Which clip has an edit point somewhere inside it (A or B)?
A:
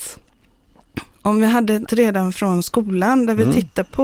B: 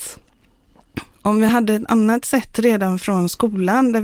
A